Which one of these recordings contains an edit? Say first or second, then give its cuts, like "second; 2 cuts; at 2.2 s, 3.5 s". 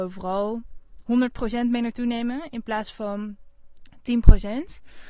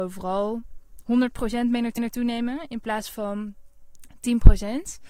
second; 1 cut; at 2.0 s